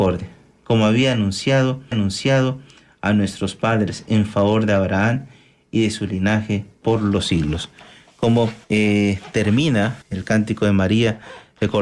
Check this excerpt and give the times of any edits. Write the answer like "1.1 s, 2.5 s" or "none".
1.9 s, 6.7 s, 8.6 s, 10.0 s